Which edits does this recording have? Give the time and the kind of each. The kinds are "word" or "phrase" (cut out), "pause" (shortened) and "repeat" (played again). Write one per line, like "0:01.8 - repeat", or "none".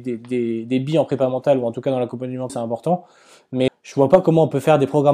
0:02.5 - word
0:03.7 - word